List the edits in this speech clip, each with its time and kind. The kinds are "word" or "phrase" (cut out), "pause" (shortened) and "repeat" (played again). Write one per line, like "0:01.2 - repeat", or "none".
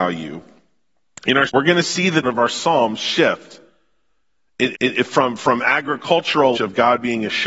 0:01.5 - phrase
0:02.2 - word
0:04.7 - repeat
0:06.5 - word